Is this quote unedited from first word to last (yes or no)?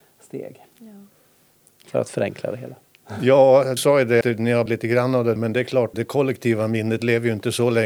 no